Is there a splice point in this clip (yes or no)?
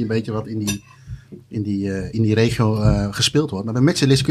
yes